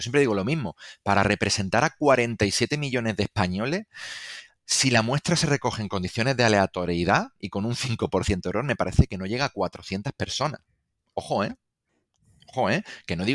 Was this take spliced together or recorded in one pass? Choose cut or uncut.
uncut